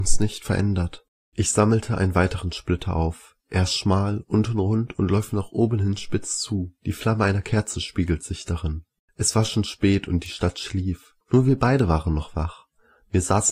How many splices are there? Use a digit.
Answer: 4